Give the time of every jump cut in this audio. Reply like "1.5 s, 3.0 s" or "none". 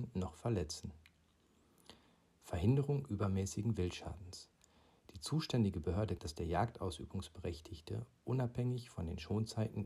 6.2 s